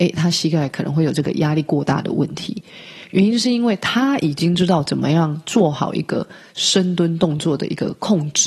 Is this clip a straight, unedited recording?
yes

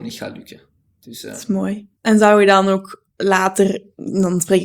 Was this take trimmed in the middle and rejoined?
yes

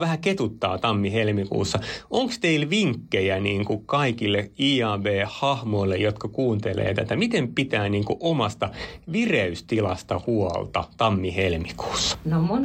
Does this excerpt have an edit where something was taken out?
no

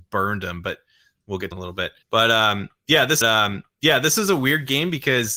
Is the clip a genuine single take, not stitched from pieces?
no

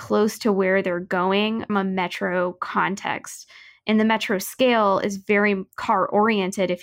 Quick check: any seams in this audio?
yes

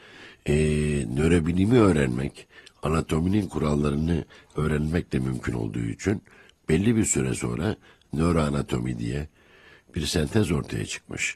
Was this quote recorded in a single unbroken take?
yes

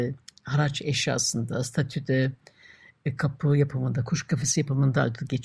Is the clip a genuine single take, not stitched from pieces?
yes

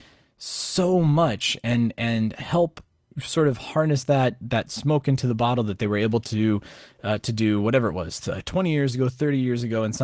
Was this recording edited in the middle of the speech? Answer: no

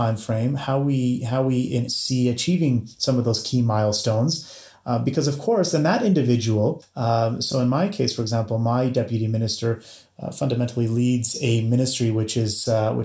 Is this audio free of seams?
no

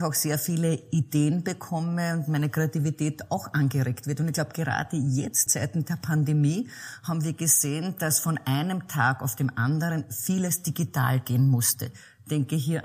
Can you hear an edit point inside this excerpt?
yes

